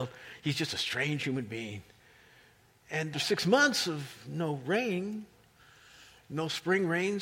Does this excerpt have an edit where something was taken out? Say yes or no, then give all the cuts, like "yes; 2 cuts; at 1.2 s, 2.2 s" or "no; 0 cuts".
yes; 1 cut; at 3.1 s